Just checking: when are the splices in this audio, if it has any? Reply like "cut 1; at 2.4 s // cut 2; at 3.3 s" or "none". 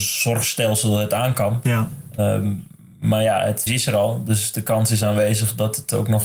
cut 1; at 3.7 s